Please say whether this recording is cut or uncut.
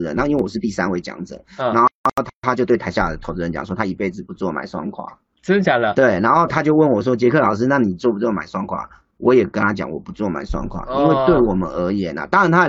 uncut